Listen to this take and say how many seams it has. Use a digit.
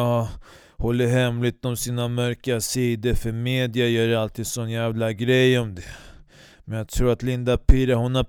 0